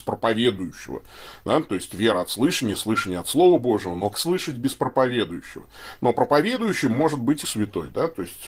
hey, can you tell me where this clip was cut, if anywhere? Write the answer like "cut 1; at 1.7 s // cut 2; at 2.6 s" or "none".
cut 1; at 4.1 s // cut 2; at 7.4 s